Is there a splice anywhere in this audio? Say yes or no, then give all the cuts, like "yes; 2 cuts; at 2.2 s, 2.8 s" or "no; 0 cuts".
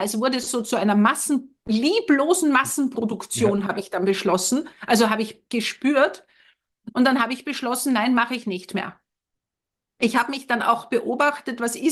no; 0 cuts